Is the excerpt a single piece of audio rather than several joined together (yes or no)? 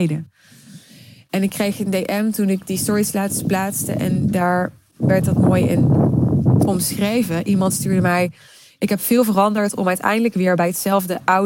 yes